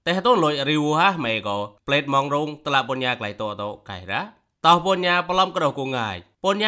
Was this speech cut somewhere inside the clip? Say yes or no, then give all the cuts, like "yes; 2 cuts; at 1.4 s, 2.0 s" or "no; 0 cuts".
no; 0 cuts